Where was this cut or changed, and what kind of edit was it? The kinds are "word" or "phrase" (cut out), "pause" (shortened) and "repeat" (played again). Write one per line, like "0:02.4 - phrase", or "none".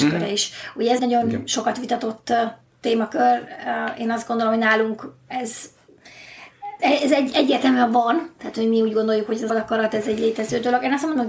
0:01.0 - word
0:06.8 - word
0:09.5 - word